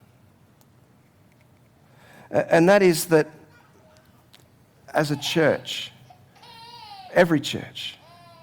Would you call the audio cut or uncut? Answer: uncut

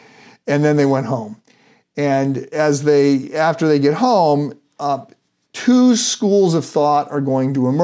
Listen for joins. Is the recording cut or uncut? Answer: uncut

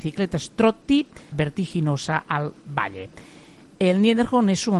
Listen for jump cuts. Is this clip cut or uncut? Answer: cut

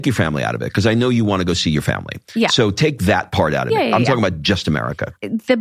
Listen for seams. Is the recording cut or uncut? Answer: uncut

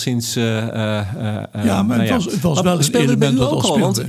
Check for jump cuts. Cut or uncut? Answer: uncut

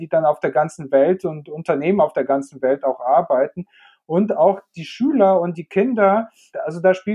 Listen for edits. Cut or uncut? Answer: uncut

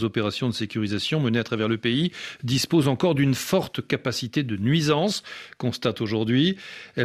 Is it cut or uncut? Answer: uncut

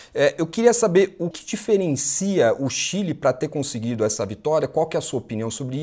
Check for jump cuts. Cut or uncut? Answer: cut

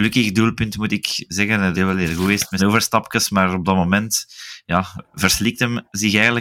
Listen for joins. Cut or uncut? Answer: cut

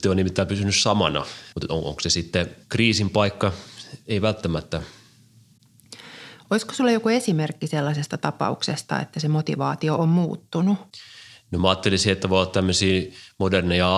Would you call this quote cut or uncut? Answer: cut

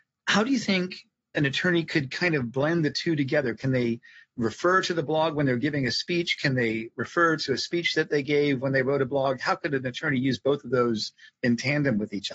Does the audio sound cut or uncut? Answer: uncut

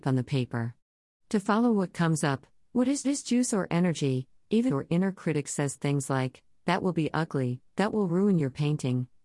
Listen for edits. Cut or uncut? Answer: cut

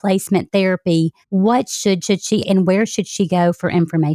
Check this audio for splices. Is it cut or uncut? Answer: cut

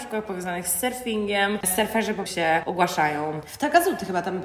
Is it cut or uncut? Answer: cut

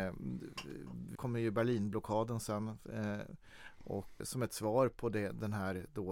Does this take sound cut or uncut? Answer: cut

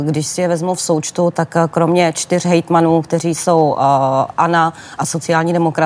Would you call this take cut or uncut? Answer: uncut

